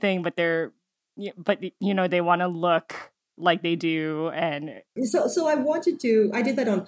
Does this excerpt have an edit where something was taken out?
yes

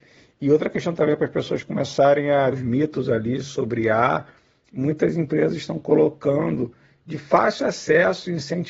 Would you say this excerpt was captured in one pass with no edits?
no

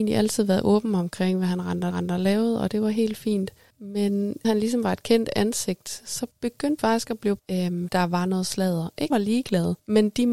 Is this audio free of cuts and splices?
no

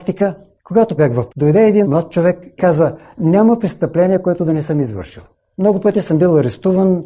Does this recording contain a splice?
yes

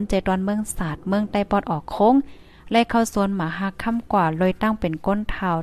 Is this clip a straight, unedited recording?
yes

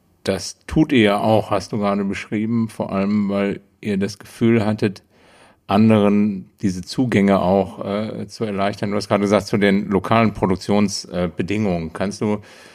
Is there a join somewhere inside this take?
no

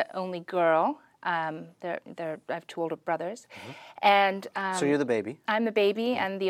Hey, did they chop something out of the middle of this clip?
no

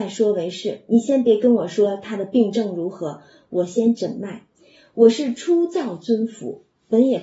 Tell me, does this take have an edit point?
no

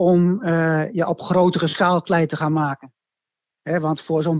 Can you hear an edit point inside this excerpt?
no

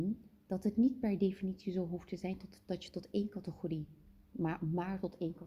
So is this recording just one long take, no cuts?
yes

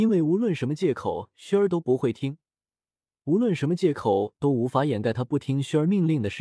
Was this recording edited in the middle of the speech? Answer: no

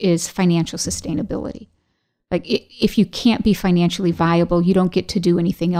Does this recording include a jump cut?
no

